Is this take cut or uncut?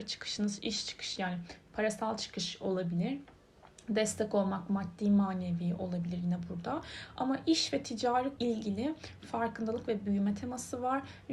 cut